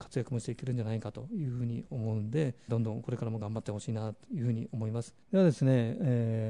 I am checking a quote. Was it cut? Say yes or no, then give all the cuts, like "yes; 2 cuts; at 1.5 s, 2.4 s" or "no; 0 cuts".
yes; 2 cuts; at 2.7 s, 5.2 s